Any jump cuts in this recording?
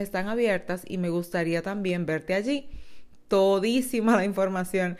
no; 0 cuts

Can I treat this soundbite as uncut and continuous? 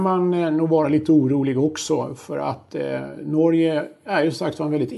yes; 0 cuts

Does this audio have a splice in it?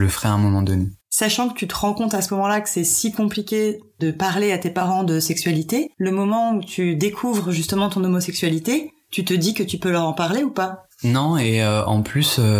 yes; 3 cuts; at 1.0 s, 5.9 s, 10.9 s

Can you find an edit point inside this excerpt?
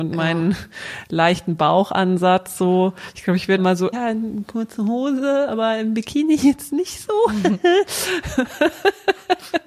yes; 2 cuts; at 3.6 s, 3.9 s

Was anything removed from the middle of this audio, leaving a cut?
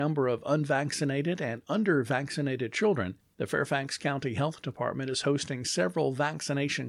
no; 0 cuts

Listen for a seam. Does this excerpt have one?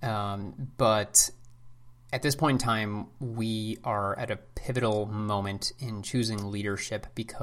no; 0 cuts

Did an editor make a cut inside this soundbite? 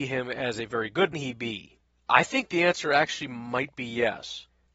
yes; 1 cut; at 1.1 s

